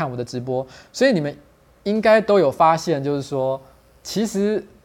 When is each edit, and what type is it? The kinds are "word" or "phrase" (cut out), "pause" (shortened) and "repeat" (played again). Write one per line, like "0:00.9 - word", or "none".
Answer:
0:03.9 - word